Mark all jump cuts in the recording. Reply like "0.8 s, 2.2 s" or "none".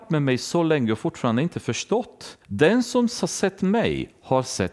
2.4 s